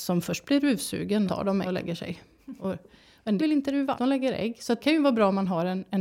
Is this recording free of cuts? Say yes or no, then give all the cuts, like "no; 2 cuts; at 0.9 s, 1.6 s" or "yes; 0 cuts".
no; 5 cuts; at 1.3 s, 1.6 s, 3.4 s, 3.9 s, 4.8 s